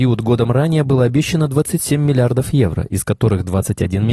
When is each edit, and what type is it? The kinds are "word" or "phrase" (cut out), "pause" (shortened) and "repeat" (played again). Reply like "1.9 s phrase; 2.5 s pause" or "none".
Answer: none

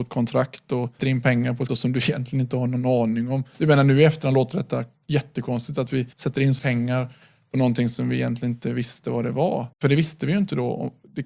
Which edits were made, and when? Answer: 1.0 s word; 1.7 s word; 3.5 s pause; 6.1 s pause; 6.6 s word; 9.7 s pause

